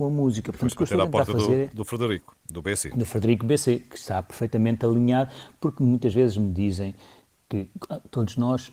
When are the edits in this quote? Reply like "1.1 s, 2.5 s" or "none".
none